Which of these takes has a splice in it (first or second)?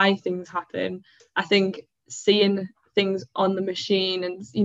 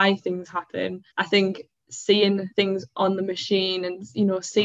second